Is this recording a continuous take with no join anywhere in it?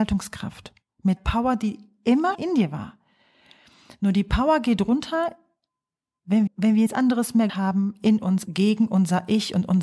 no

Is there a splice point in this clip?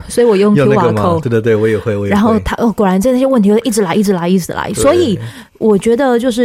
no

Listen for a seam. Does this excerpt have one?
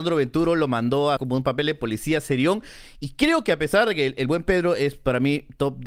yes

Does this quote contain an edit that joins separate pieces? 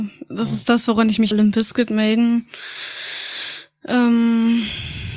yes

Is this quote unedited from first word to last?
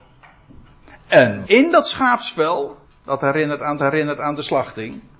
no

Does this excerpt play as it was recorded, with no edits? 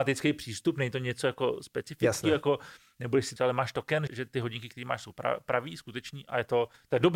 no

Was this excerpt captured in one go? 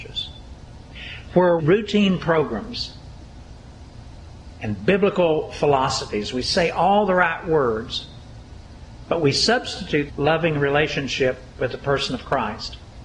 no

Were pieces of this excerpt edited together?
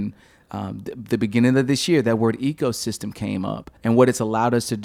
yes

